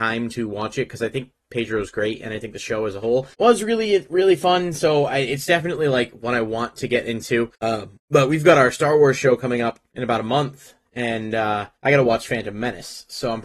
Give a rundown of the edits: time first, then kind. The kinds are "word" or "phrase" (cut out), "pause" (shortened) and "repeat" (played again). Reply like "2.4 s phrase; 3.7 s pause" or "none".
3.3 s pause; 7.6 s pause; 8.0 s pause; 9.9 s pause; 11.8 s pause

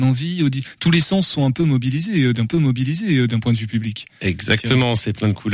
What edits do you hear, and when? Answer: 2.5 s repeat

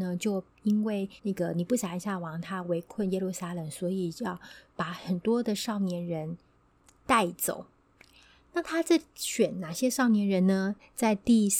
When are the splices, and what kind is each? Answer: 1.2 s pause

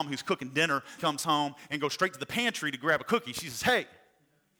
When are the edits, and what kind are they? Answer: 1.0 s word

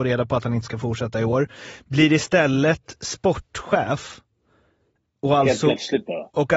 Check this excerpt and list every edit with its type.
none

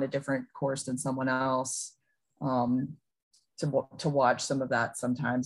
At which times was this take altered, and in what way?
none

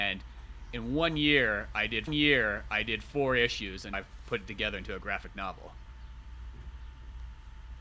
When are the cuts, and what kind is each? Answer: 2.1 s repeat; 3.9 s word

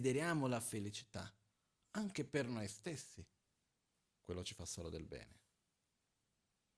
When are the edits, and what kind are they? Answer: none

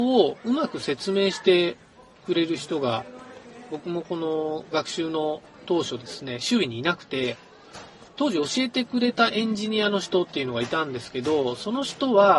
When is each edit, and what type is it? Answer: 8.1 s pause

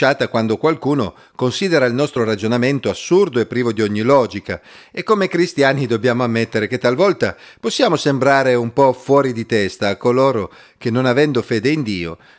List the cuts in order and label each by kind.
none

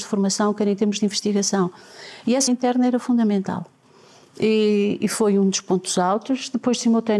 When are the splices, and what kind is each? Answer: 2.5 s word; 5.0 s word

